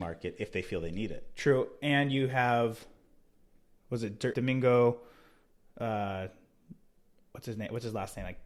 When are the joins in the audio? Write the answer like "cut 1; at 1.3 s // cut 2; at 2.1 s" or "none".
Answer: cut 1; at 4.3 s